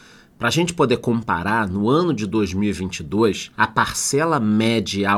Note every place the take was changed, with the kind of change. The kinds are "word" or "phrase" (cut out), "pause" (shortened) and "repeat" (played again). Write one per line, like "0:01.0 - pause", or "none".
0:03.5 - pause